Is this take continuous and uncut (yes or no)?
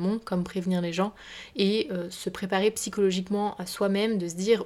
yes